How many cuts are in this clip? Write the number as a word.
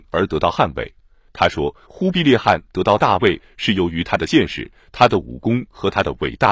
zero